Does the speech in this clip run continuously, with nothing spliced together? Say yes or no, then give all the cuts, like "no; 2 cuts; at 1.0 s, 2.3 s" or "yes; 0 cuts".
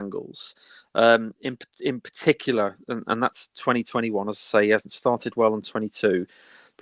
yes; 0 cuts